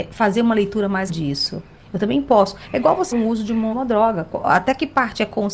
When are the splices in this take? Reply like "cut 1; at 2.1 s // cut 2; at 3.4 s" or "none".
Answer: cut 1; at 1.1 s // cut 2; at 3.1 s // cut 3; at 3.7 s